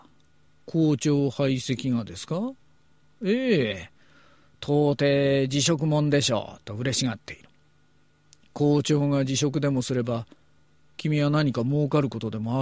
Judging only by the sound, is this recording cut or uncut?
uncut